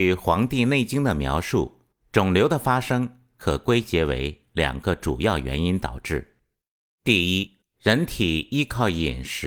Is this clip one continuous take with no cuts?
yes; 0 cuts

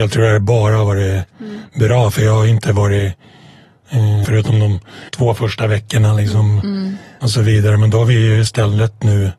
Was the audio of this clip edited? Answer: yes; 2 cuts; at 4.2 s, 5.1 s

